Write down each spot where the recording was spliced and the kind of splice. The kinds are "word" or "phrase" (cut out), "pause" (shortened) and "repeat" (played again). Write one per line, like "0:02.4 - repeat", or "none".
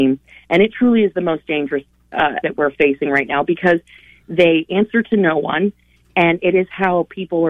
0:02.4 - word